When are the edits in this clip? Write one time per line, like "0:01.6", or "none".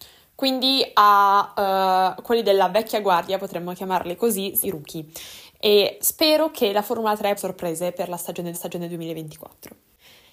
0:04.6
0:06.0
0:07.4
0:08.5

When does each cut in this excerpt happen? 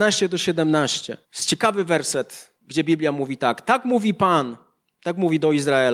0:01.2
0:02.6

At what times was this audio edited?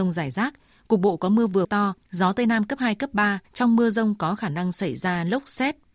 0:01.6
0:02.0
0:03.5

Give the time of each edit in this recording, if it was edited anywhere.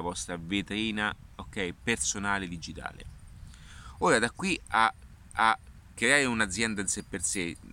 0:05.3

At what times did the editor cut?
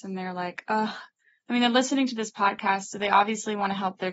none

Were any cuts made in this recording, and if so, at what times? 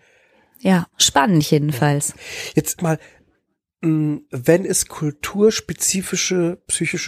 0:02.8

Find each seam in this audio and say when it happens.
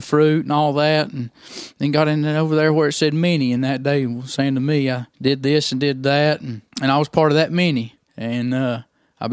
0:05.1
0:06.7
0:08.0

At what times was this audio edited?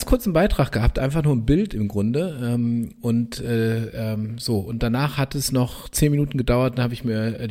none

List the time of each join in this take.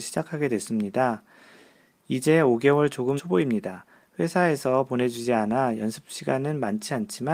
0:03.2

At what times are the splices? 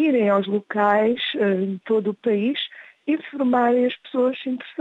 none

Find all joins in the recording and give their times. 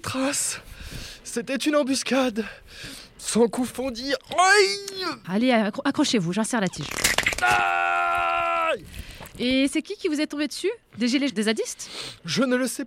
0:03.7
0:05.2
0:11.3

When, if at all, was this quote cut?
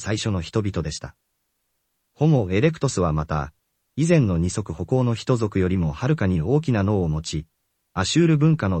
none

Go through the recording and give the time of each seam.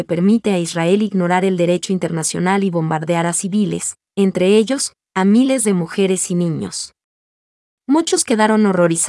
none

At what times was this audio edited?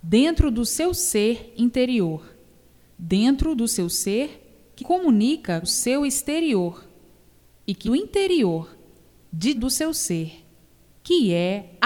0:04.8
0:05.6
0:07.8
0:09.5

